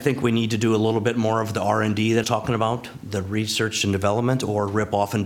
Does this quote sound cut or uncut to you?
cut